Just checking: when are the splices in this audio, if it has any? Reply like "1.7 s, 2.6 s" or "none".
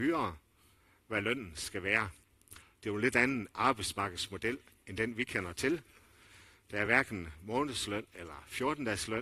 none